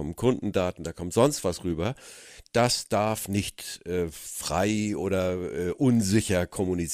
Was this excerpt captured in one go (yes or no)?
yes